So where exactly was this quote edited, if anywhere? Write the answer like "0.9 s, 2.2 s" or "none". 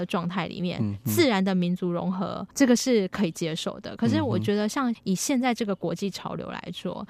2.5 s